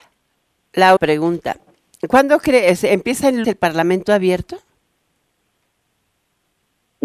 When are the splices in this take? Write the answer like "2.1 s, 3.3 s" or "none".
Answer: 1.0 s, 3.4 s